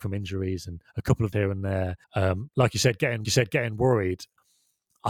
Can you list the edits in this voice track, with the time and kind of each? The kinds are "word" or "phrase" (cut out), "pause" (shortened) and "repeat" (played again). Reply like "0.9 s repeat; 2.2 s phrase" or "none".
1.3 s phrase; 2.0 s pause; 3.2 s repeat